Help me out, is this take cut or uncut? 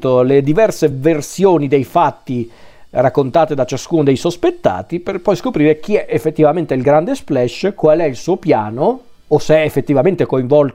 uncut